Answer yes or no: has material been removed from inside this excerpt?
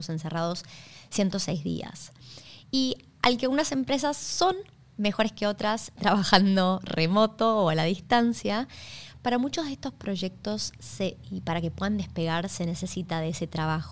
yes